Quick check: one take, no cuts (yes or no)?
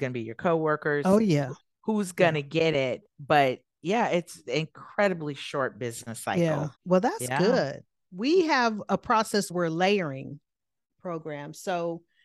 no